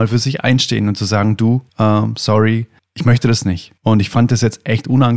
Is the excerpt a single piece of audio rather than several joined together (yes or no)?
no